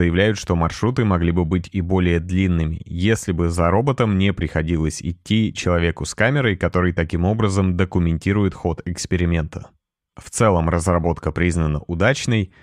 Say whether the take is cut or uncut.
uncut